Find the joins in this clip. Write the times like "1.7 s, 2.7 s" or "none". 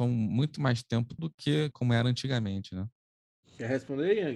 1.2 s, 1.7 s